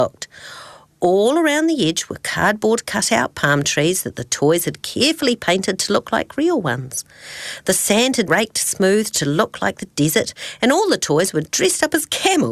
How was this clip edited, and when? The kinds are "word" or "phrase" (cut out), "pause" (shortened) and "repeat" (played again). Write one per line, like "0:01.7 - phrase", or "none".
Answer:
0:08.3 - word